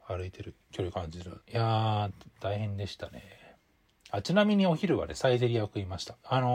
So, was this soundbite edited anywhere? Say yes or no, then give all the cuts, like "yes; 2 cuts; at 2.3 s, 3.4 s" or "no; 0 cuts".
yes; 1 cut; at 1.4 s